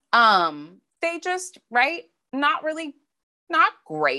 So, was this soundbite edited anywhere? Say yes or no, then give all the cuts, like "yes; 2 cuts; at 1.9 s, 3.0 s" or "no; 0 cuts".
no; 0 cuts